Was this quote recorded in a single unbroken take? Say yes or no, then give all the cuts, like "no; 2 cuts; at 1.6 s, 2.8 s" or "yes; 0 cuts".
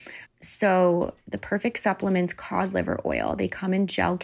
yes; 0 cuts